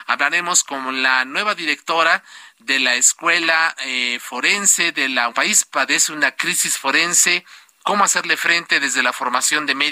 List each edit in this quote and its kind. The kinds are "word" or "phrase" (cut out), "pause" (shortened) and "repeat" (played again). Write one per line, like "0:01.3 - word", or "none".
0:05.3 - phrase